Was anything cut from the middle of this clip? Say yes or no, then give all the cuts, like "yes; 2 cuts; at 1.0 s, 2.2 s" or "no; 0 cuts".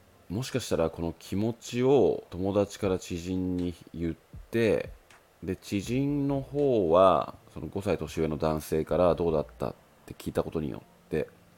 yes; 1 cut; at 2.3 s